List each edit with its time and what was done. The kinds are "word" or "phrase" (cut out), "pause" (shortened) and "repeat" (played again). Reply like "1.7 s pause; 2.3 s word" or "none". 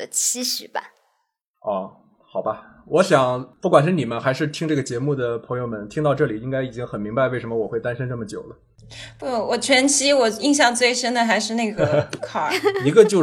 12.2 s word